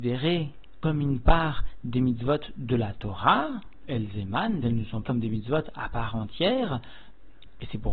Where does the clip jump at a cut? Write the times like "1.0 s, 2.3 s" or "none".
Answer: 3.8 s, 4.6 s, 5.0 s